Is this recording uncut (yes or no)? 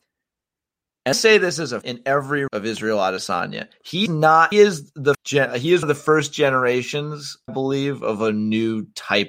no